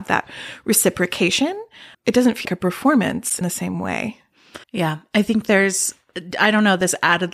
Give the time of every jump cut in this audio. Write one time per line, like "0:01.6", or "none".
0:01.9
0:02.4
0:03.4
0:04.6